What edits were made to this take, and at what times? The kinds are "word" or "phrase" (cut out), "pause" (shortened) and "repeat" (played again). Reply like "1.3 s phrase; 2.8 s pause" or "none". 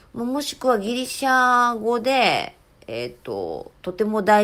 none